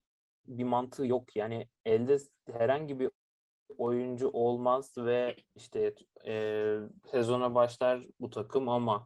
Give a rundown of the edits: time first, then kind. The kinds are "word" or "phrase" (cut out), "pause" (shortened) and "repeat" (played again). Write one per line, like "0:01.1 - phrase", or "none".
0:01.8 - pause
0:05.4 - pause